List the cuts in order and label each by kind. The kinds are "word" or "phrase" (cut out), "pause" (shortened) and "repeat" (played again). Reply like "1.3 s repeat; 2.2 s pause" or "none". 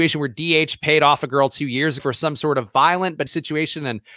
2.0 s word; 3.3 s phrase